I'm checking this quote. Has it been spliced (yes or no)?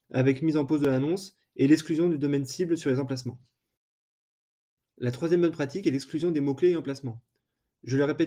no